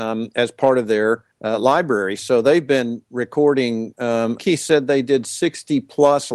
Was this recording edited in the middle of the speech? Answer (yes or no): yes